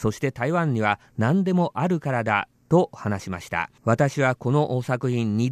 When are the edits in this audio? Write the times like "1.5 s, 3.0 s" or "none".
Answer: 3.8 s